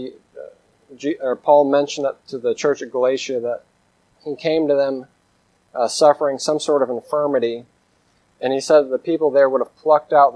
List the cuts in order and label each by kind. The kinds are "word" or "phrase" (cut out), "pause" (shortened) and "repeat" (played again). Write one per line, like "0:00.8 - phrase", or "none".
none